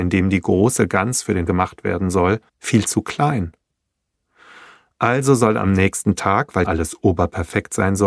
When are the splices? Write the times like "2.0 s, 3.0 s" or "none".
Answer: 1.5 s, 2.5 s, 6.6 s